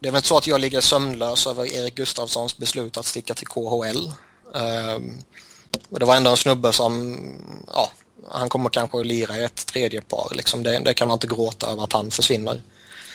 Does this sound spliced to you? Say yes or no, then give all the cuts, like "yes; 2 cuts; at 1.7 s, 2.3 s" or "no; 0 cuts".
no; 0 cuts